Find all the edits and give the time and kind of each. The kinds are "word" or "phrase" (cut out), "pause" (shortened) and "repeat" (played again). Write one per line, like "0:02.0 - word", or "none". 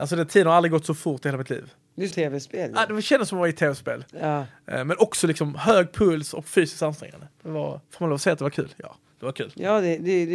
0:02.1 - word
0:07.3 - pause
0:07.8 - pause